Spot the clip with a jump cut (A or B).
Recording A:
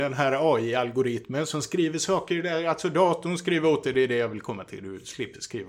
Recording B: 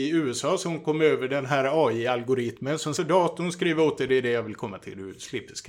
B